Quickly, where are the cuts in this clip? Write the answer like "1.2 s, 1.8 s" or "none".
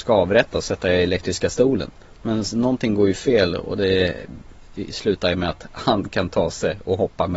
2.0 s